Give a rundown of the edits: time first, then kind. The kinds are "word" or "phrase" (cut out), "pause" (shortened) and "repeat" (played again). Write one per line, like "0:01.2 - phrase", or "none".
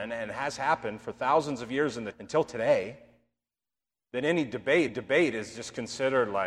0:02.1 - word
0:04.9 - repeat